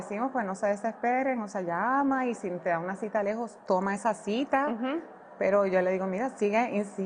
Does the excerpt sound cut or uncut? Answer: uncut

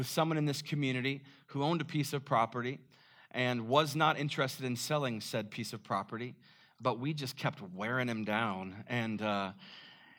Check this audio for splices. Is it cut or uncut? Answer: uncut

